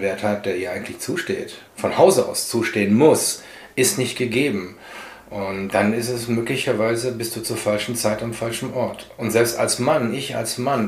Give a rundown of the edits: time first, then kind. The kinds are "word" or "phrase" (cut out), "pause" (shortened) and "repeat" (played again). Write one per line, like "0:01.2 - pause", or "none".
0:01.7 - pause
0:05.7 - word